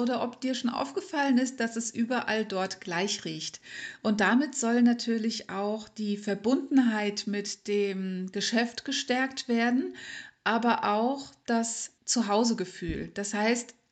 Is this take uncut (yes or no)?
no